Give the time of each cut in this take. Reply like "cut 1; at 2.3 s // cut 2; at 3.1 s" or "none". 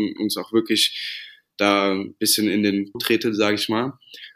cut 1; at 2.9 s